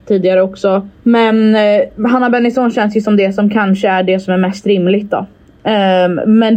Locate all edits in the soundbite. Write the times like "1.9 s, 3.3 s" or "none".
0.9 s